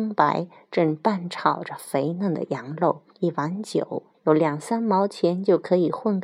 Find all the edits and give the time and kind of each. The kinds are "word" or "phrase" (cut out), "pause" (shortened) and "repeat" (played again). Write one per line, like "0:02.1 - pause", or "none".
0:03.1 - pause
0:04.1 - phrase

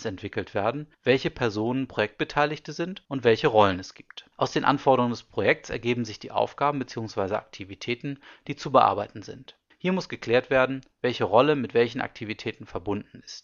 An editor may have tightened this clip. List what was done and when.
0:00.9 - pause
0:03.0 - pause
0:04.3 - pause
0:09.7 - pause

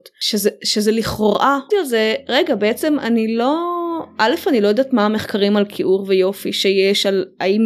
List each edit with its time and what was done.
0:01.7 - phrase

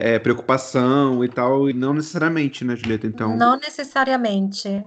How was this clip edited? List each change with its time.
0:01.7 - word

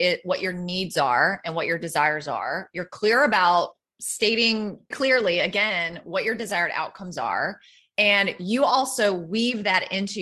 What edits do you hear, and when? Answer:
0:04.9 - word

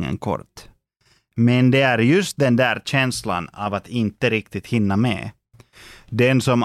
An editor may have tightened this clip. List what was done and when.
none

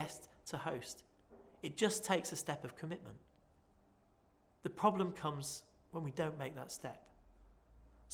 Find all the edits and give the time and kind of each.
none

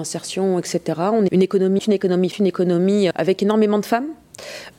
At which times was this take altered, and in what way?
0:01.3 - word
0:01.8 - word
0:02.3 - word
0:03.1 - word

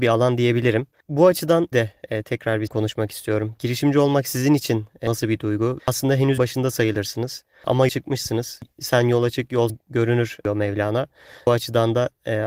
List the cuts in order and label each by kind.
0:01.7 - word
0:02.7 - word
0:05.8 - word
0:06.4 - word
0:07.9 - word
0:09.7 - word

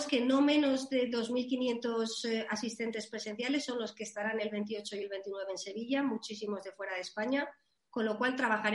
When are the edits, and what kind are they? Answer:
none

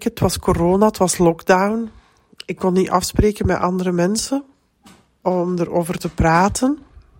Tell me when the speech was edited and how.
none

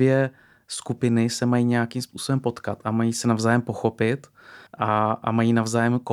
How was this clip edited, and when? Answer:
0:04.7 - pause

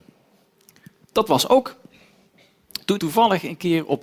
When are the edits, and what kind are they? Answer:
0:03.0 - word

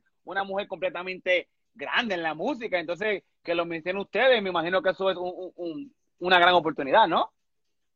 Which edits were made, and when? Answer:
none

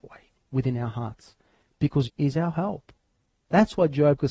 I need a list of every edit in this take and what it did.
0:02.0 - word

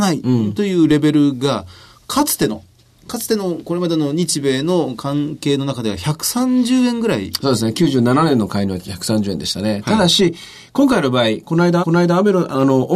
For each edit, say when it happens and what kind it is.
0:11.8 - repeat

